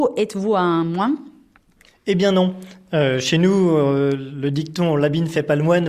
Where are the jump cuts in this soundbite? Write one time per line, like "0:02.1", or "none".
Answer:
none